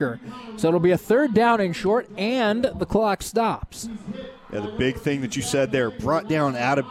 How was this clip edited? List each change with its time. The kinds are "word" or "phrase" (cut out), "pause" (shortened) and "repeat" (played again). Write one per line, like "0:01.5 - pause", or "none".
none